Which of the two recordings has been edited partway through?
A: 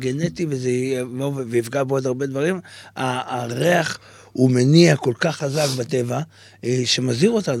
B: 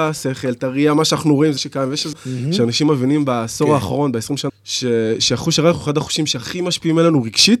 B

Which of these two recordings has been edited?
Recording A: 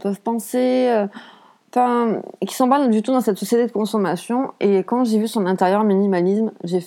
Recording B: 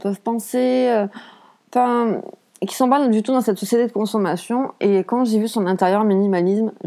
A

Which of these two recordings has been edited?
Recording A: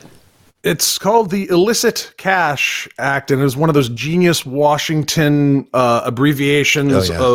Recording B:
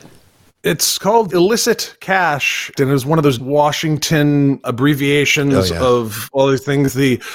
B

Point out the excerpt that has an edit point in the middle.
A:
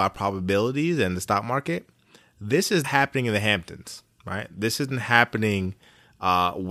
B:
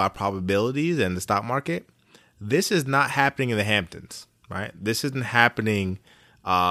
A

